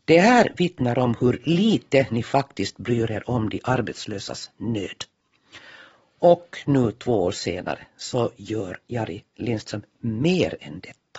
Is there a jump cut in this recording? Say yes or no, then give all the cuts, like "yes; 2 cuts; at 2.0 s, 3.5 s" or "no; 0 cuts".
no; 0 cuts